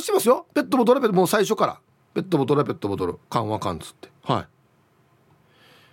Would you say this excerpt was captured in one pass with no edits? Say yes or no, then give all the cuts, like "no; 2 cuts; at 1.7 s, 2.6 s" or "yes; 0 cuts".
no; 2 cuts; at 3.2 s, 4.2 s